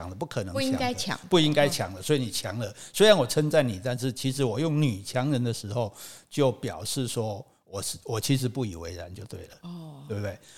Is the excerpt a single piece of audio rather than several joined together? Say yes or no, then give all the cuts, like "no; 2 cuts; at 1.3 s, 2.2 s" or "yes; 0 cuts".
yes; 0 cuts